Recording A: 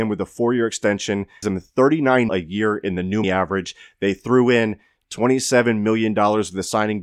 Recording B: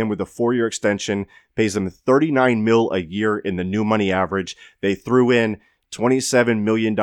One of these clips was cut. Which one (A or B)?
A